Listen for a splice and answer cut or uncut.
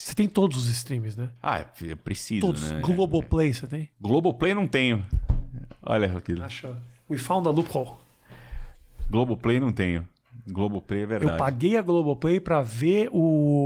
cut